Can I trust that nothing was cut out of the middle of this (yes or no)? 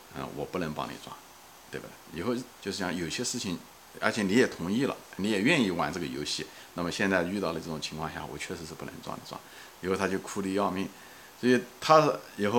no